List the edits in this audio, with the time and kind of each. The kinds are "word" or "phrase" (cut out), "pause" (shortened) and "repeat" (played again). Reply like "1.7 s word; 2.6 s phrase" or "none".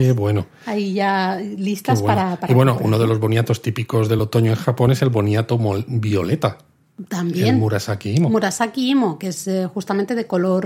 none

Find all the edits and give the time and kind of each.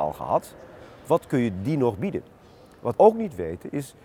2.9 s word

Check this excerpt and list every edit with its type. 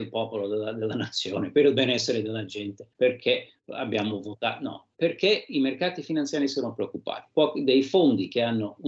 2.9 s pause

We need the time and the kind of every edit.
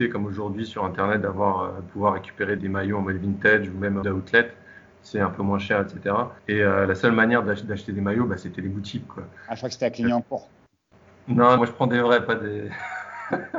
2.6 s word; 4.0 s word; 6.4 s pause; 11.6 s word

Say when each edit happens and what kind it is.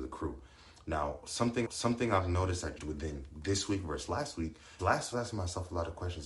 1.7 s repeat; 2.8 s word; 4.8 s word; 5.1 s phrase

